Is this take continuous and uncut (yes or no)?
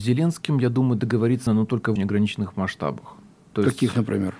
no